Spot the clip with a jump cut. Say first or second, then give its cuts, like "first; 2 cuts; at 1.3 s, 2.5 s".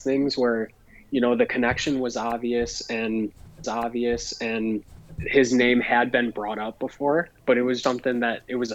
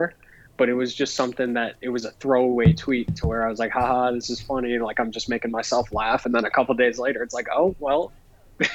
first; 3 cuts; at 3.6 s, 7.4 s, 7.8 s